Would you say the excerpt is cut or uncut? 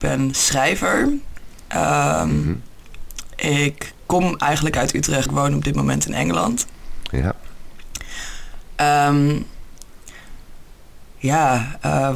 cut